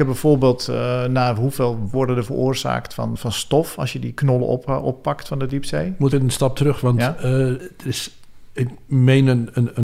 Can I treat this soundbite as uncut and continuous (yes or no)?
no